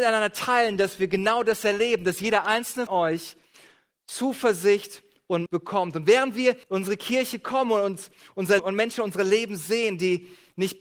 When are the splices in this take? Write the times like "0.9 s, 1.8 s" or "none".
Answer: 2.9 s, 5.5 s, 6.6 s, 8.6 s